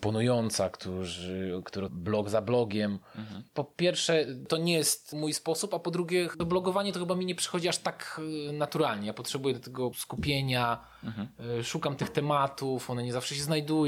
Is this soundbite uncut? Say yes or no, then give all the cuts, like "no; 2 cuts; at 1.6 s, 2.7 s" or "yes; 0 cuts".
no; 3 cuts; at 1.9 s, 3.5 s, 9.9 s